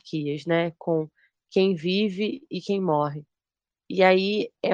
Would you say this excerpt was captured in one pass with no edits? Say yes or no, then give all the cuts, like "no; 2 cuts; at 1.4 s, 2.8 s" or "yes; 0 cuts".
yes; 0 cuts